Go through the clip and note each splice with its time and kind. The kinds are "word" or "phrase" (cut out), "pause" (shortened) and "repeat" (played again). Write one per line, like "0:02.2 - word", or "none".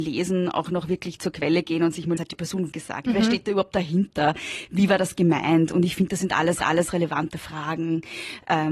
0:02.2 - phrase
0:02.7 - word
0:06.6 - repeat